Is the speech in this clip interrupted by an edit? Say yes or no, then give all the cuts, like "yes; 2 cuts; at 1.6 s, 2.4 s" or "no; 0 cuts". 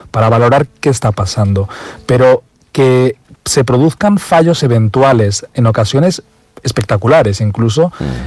no; 0 cuts